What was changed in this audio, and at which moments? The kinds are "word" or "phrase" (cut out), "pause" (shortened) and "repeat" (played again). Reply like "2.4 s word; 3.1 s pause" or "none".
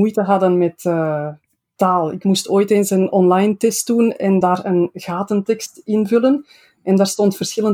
none